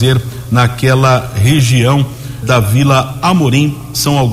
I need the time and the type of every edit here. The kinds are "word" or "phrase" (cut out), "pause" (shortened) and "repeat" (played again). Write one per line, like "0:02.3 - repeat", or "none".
0:02.4 - word